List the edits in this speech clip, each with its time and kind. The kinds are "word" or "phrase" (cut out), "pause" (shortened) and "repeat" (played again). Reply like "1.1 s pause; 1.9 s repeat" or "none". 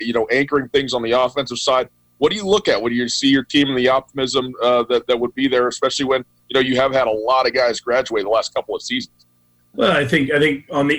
none